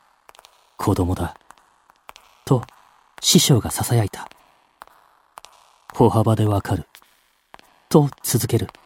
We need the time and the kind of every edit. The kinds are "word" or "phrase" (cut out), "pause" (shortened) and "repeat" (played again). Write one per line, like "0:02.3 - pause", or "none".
none